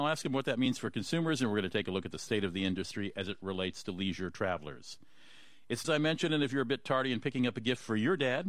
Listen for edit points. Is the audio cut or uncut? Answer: cut